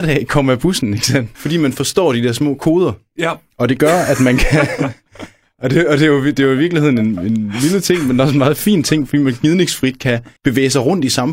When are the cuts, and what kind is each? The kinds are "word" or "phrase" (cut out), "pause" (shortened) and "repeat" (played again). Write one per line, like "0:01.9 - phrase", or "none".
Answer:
0:01.3 - pause
0:10.4 - pause